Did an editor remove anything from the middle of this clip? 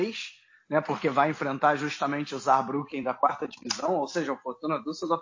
no; 0 cuts

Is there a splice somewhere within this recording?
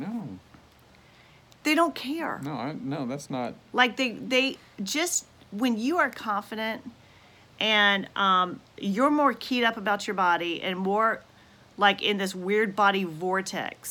no; 0 cuts

